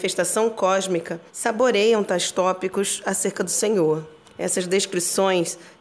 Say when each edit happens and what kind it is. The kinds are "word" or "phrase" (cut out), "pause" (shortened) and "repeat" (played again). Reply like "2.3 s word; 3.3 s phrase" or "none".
1.3 s pause; 4.2 s pause